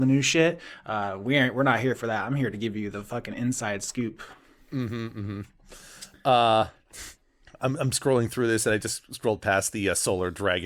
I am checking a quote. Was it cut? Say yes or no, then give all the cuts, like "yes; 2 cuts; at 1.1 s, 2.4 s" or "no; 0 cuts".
yes; 1 cut; at 7.2 s